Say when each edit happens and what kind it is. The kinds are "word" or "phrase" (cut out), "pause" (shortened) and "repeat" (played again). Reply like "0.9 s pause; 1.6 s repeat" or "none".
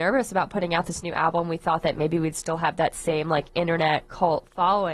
none